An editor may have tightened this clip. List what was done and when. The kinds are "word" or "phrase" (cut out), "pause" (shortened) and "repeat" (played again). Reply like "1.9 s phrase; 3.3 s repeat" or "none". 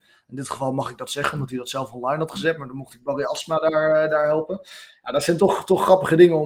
5.4 s word